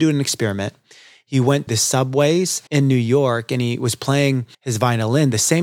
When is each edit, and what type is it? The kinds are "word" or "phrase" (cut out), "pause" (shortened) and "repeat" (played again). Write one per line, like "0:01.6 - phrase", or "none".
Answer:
0:01.7 - word
0:02.7 - pause
0:04.5 - pause

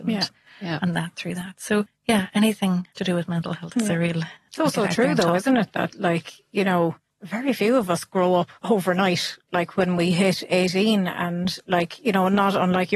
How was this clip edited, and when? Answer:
0:02.9 - pause
0:08.6 - pause

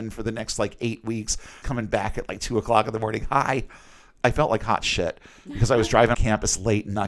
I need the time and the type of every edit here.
0:01.6 - word
0:06.1 - word

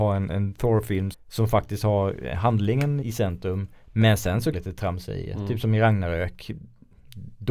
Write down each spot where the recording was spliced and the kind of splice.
0:01.1 - word
0:03.0 - word
0:04.5 - phrase

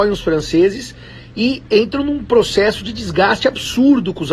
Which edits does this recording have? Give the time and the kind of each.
0:01.6 - pause

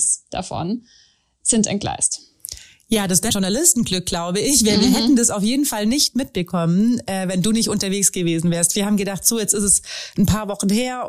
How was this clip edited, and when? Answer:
0:03.3 - word

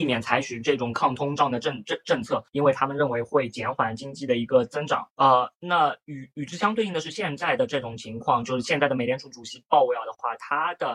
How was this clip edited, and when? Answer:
0:02.5 - pause
0:05.1 - pause

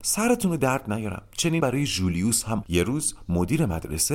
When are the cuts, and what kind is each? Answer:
0:01.6 - word
0:02.6 - word

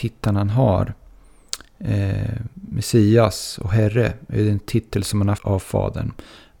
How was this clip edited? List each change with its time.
0:02.5 - pause
0:05.4 - word

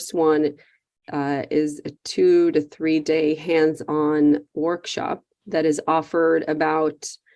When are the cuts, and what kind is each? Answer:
0:05.3 - pause

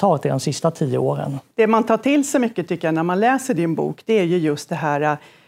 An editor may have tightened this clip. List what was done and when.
0:01.5 - pause

